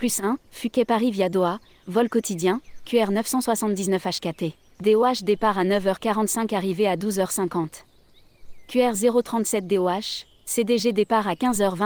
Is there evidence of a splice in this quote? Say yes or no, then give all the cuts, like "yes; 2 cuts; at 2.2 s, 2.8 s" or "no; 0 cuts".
no; 0 cuts